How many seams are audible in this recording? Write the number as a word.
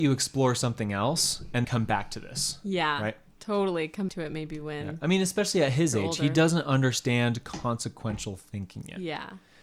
two